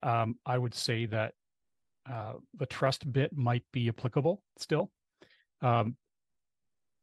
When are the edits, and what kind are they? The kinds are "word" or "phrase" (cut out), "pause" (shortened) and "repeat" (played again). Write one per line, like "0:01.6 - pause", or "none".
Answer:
0:04.5 - pause